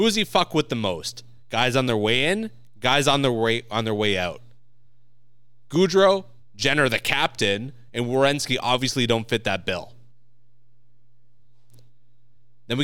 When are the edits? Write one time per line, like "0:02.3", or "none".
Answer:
none